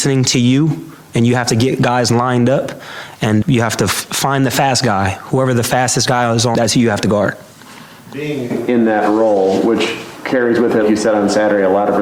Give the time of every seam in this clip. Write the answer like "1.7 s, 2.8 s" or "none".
3.4 s, 6.5 s, 10.8 s